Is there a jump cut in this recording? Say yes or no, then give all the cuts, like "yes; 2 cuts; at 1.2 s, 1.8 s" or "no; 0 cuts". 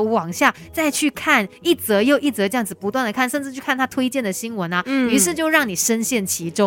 no; 0 cuts